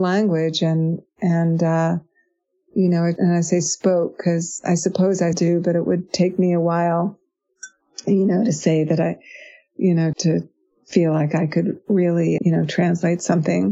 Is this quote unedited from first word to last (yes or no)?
no